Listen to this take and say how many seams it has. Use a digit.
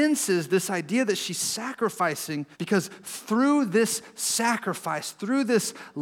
1